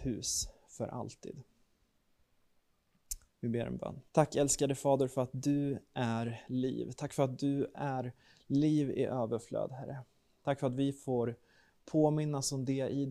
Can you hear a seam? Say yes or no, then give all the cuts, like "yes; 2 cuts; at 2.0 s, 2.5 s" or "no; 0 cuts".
yes; 1 cut; at 4.1 s